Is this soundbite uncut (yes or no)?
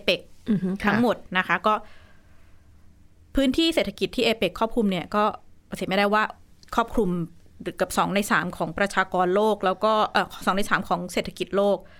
yes